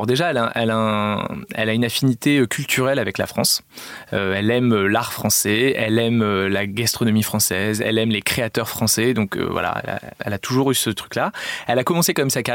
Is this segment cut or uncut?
cut